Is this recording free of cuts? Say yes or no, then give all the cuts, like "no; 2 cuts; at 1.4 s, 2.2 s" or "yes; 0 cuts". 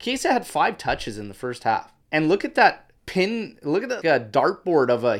no; 3 cuts; at 2.0 s, 3.0 s, 4.0 s